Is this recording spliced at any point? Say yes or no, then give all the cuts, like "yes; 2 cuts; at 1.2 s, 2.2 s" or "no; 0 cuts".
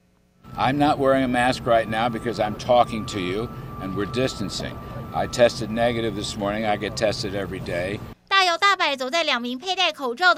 no; 0 cuts